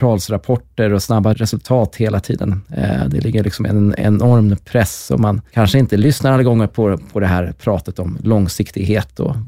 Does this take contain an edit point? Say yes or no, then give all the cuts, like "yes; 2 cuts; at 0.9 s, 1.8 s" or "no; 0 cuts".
no; 0 cuts